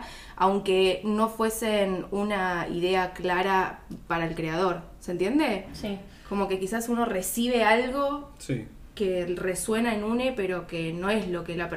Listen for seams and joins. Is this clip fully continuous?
yes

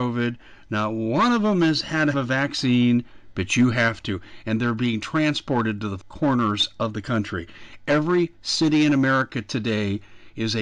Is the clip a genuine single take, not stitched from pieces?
no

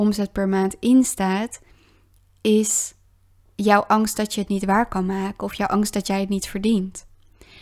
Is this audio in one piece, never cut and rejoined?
yes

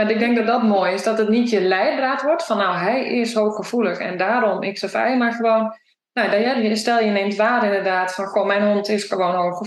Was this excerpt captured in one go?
yes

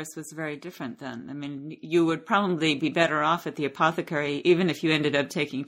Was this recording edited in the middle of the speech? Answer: no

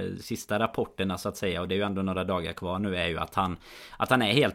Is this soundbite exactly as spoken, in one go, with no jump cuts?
yes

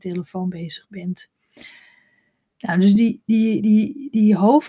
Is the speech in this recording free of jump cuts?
yes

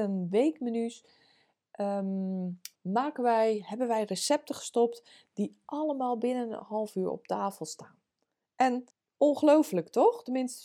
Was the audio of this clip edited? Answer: yes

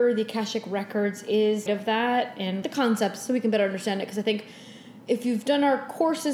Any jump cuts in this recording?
yes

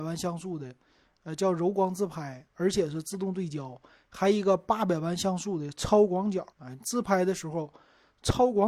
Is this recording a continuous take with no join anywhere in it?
no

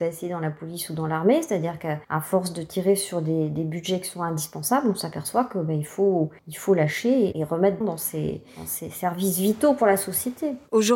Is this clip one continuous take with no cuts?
no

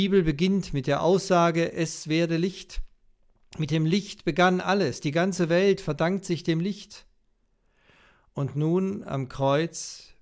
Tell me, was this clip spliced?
no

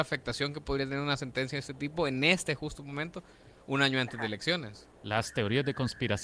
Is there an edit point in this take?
no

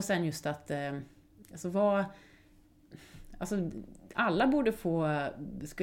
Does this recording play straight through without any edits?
yes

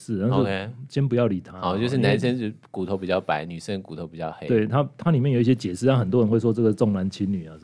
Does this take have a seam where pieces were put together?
no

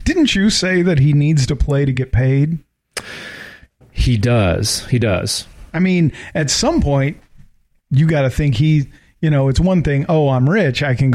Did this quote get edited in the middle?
no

